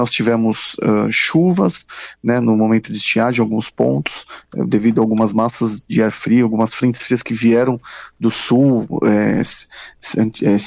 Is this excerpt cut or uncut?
uncut